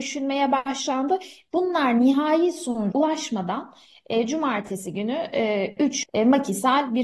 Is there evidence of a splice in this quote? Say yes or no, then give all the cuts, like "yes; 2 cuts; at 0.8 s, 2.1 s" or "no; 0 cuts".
yes; 2 cuts; at 2.9 s, 6.0 s